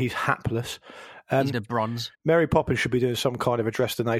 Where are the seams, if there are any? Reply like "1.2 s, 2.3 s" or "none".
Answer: 1.5 s, 2.1 s